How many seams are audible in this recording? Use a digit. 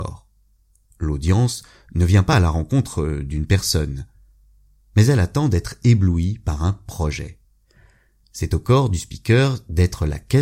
0